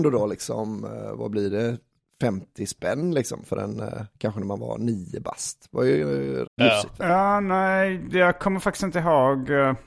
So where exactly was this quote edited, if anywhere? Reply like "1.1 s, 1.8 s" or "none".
6.5 s